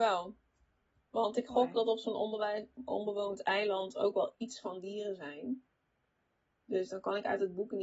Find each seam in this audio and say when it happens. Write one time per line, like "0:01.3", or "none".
none